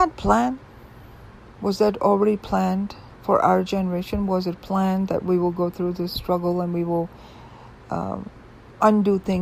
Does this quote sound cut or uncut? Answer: uncut